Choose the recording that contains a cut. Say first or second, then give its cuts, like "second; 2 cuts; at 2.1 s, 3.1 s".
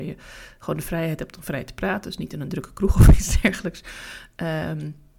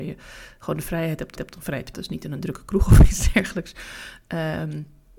second; 2 cuts; at 1.4 s, 1.9 s